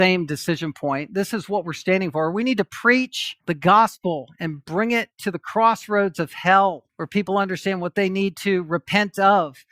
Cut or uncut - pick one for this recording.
cut